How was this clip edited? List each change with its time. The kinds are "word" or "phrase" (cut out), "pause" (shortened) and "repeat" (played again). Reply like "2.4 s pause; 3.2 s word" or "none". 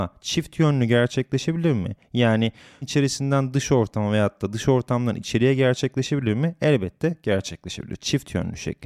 2.8 s word